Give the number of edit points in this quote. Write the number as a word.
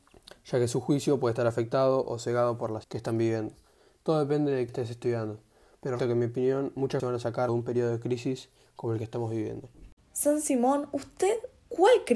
five